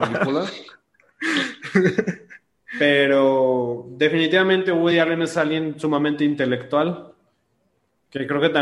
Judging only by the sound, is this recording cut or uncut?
uncut